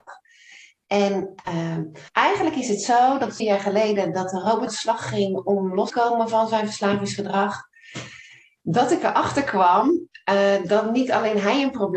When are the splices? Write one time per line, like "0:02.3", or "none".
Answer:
0:02.1
0:03.4
0:04.7
0:05.9